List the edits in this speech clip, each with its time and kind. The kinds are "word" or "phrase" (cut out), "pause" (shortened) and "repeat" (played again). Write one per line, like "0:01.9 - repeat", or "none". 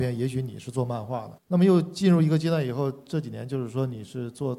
0:01.4 - pause